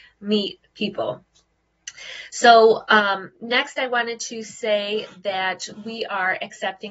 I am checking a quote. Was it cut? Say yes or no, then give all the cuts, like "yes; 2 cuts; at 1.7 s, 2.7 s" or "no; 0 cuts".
no; 0 cuts